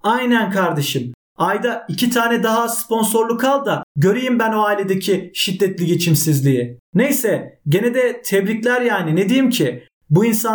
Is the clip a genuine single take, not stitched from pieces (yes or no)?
no